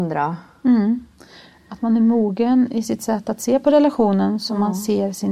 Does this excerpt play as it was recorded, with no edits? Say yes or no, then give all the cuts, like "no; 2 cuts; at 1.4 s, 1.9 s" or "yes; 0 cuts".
yes; 0 cuts